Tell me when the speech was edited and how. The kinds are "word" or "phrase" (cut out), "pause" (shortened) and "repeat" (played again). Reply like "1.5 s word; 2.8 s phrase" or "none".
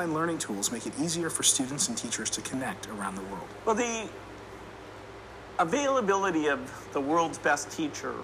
none